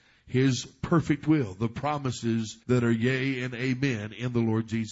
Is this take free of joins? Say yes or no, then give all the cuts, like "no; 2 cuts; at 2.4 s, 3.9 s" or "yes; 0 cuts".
no; 1 cut; at 2.6 s